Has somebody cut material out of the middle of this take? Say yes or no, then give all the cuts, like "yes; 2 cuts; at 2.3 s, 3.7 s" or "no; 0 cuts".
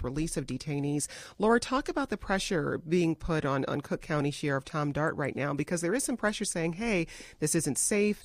no; 0 cuts